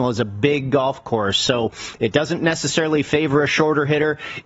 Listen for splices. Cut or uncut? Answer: uncut